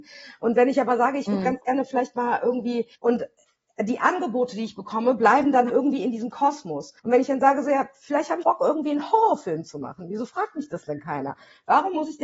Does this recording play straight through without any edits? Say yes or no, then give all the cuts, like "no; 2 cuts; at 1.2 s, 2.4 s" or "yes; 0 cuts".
no; 4 cuts; at 3.0 s, 5.7 s, 7.0 s, 8.4 s